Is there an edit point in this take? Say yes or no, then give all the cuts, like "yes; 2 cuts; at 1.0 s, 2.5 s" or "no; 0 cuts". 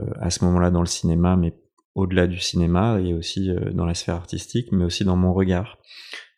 no; 0 cuts